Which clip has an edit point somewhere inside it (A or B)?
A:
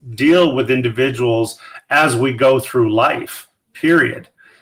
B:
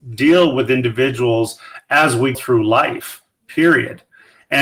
B